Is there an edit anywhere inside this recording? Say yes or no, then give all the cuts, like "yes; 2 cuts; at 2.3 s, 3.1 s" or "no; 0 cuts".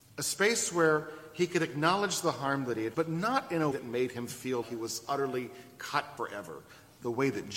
yes; 4 cuts; at 2.9 s, 3.7 s, 4.6 s, 6.2 s